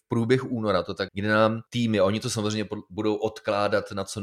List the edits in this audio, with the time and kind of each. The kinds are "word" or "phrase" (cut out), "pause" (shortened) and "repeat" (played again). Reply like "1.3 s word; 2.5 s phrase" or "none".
1.1 s word; 1.7 s pause